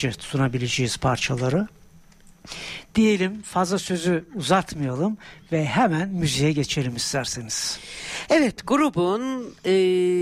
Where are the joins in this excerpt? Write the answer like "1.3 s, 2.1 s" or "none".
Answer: none